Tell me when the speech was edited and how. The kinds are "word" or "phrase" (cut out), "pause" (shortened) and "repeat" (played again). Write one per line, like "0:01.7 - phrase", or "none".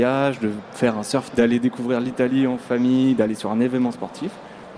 0:01.3 - word